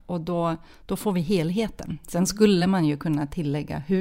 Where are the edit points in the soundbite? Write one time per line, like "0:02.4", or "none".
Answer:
none